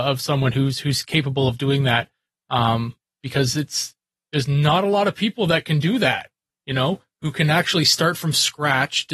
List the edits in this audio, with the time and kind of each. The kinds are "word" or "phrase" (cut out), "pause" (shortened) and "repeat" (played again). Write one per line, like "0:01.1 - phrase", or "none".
none

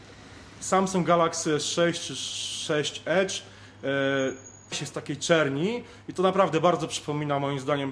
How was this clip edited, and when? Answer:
0:04.7 - word

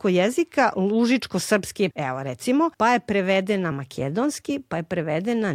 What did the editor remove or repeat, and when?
0:01.9 - word
0:02.7 - pause
0:03.7 - word

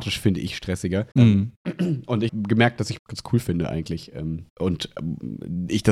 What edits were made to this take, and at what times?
0:01.1 - pause
0:02.3 - word
0:03.0 - phrase
0:04.5 - pause

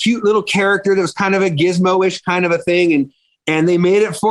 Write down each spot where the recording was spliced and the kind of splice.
none

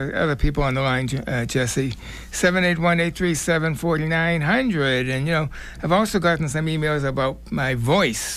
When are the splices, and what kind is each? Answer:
none

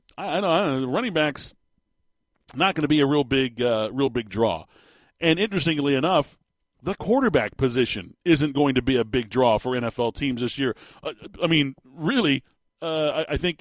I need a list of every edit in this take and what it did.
none

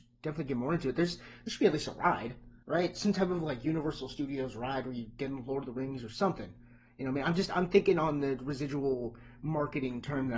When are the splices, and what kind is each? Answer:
0:02.6 - pause

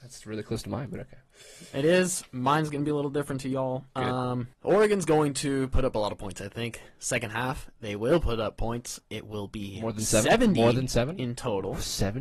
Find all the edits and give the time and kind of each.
0:04.5 - pause

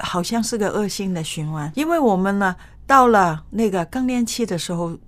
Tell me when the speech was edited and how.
0:01.7 - word

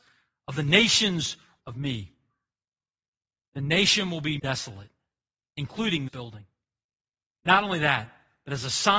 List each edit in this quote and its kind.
0:01.6 - word
0:04.4 - word
0:06.1 - word

